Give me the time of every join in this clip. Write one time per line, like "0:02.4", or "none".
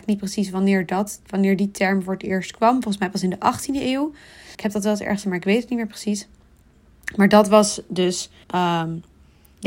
0:04.5
0:05.2
0:08.4